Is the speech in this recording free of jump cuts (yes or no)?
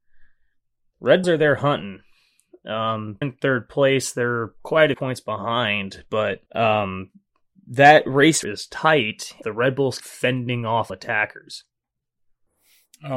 no